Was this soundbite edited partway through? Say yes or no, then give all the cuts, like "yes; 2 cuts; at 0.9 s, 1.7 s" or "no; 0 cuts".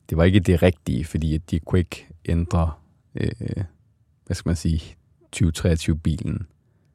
no; 0 cuts